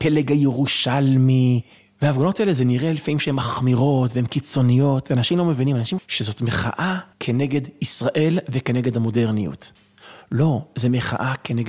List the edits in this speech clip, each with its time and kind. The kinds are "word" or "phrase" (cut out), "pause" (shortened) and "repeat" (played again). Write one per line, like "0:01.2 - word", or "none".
0:06.0 - word
0:07.1 - pause